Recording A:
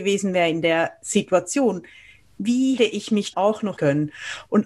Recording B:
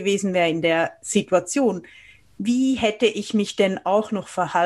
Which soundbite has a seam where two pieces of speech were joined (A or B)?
A